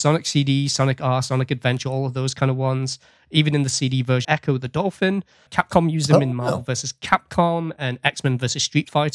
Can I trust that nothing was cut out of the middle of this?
no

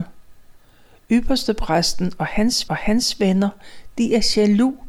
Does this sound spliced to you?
yes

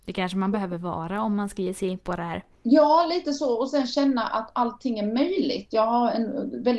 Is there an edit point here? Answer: yes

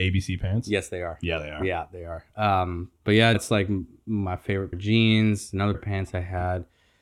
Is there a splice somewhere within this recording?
yes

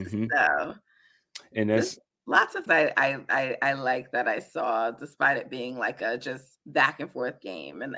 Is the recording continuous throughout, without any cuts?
no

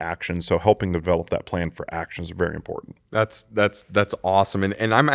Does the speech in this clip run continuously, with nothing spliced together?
yes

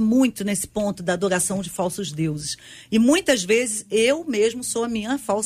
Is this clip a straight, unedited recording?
yes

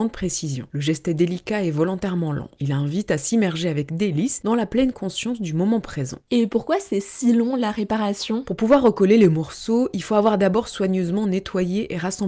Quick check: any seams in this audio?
no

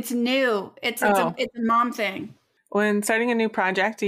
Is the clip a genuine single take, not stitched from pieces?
yes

